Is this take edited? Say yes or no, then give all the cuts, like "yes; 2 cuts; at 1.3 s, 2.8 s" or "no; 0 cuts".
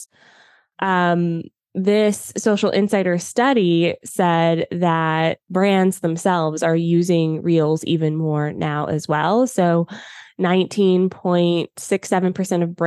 no; 0 cuts